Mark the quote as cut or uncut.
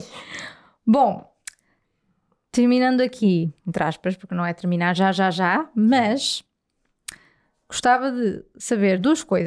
uncut